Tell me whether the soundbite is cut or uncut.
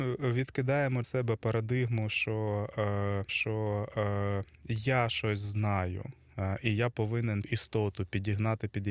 cut